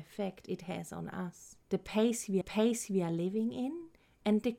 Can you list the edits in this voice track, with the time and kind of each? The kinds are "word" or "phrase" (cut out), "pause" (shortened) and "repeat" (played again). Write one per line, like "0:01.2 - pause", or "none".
0:01.6 - pause
0:02.4 - repeat